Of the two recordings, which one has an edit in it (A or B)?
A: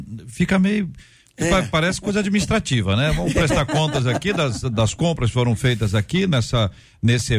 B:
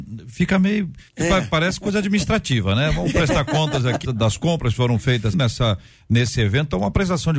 B